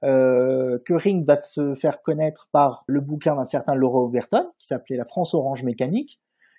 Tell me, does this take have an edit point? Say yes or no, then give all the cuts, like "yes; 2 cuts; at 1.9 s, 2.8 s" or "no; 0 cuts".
yes; 1 cut; at 2.9 s